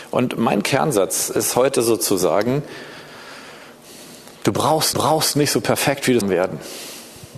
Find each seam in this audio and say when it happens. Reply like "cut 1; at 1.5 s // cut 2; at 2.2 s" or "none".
cut 1; at 4.4 s // cut 2; at 4.9 s // cut 3; at 6.2 s